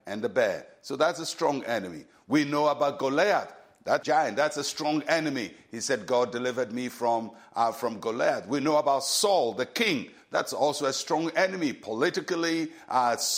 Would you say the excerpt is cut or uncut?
cut